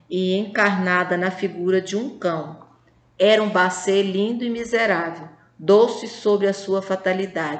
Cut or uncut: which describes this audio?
uncut